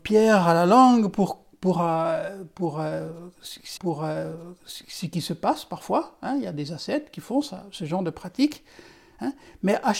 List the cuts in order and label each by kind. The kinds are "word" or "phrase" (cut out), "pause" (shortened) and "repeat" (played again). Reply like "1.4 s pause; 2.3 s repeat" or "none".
3.8 s repeat